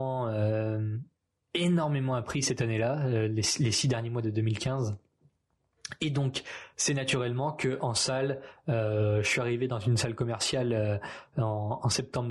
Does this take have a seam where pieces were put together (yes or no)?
no